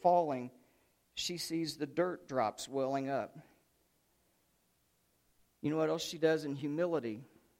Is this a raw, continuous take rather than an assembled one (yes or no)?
yes